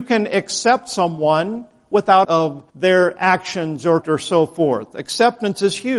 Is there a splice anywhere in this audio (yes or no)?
yes